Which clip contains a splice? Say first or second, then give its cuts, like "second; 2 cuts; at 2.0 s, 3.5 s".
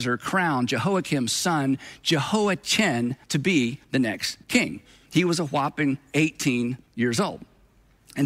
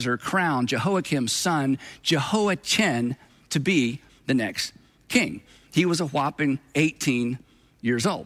first; 4 cuts; at 3.2 s, 3.8 s, 4.4 s, 6.9 s